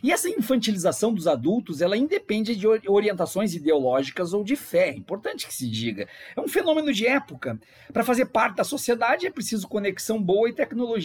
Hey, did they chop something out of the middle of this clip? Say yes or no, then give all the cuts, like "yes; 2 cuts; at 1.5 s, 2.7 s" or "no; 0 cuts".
no; 0 cuts